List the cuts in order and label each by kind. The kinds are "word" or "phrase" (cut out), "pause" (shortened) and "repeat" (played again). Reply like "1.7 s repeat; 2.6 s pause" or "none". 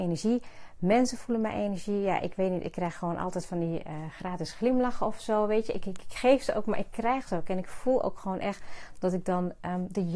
none